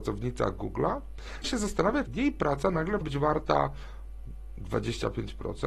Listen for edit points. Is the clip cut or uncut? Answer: cut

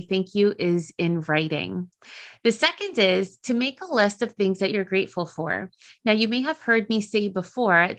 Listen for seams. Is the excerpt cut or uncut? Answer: uncut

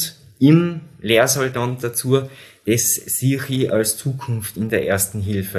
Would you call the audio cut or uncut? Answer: cut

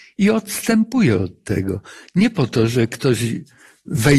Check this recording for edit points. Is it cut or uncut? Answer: uncut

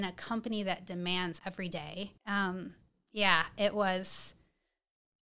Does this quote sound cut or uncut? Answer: cut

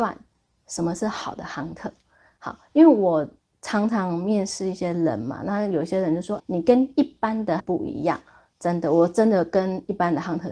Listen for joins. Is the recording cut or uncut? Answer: cut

